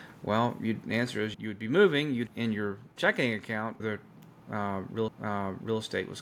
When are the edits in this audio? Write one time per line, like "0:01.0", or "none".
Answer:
0:01.3
0:02.3
0:02.9
0:03.8
0:05.1